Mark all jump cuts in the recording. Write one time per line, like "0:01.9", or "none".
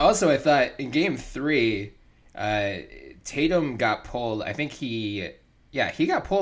none